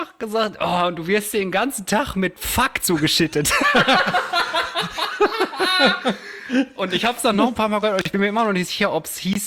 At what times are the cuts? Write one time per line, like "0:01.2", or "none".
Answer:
none